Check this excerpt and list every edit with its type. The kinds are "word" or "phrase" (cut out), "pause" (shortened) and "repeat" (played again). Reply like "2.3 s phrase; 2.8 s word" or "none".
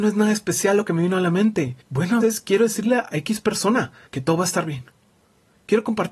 1.8 s pause; 2.2 s word; 4.1 s pause